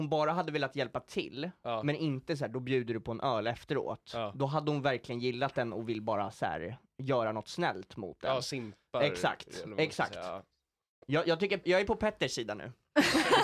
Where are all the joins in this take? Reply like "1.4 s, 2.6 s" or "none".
11.6 s

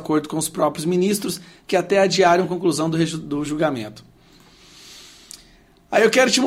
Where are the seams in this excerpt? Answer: none

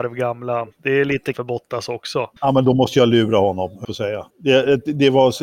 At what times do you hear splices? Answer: 1.3 s, 2.4 s, 3.8 s, 4.3 s

